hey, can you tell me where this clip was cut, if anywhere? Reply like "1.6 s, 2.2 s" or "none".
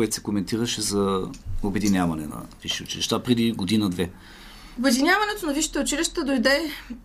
2.6 s